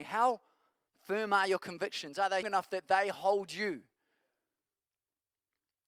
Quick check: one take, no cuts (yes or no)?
no